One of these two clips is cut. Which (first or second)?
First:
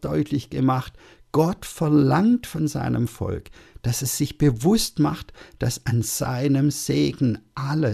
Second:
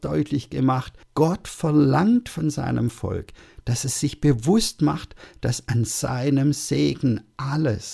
second